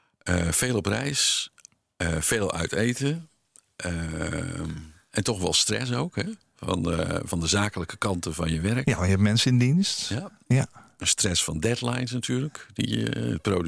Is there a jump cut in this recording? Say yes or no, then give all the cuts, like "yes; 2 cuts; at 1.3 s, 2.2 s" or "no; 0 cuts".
no; 0 cuts